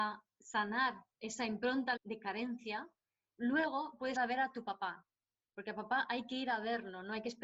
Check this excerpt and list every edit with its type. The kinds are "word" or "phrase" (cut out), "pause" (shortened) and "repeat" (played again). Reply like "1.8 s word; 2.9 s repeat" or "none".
1.1 s word; 2.0 s word; 3.3 s word; 4.2 s word